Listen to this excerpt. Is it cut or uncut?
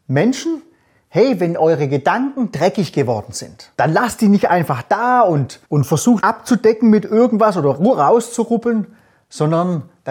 cut